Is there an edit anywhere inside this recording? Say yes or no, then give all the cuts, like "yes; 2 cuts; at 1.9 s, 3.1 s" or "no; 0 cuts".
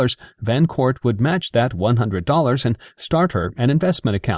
no; 0 cuts